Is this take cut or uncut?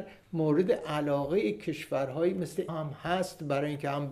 cut